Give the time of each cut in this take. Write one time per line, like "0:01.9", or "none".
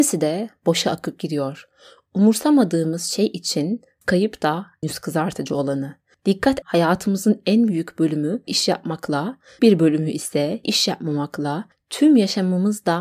0:04.0
0:04.8
0:06.6
0:08.5
0:09.6
0:10.6